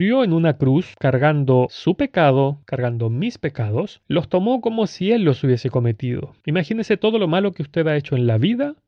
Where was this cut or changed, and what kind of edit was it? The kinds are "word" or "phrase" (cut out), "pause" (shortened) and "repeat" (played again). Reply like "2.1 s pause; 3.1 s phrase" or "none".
none